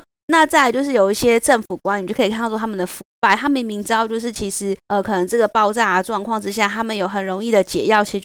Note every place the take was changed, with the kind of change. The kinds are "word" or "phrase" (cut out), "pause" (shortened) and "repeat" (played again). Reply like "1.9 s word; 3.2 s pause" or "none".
4.8 s pause